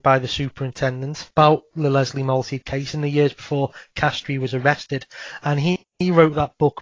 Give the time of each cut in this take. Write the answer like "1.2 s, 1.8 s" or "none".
none